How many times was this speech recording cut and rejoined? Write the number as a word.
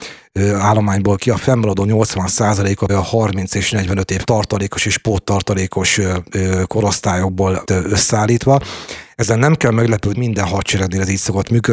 five